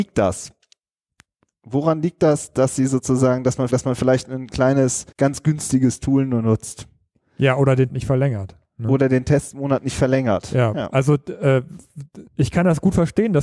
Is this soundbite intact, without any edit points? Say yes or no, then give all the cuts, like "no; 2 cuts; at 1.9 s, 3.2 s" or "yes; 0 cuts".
no; 4 cuts; at 3.7 s, 5.1 s, 7.9 s, 12.3 s